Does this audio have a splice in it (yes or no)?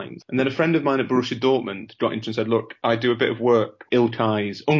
yes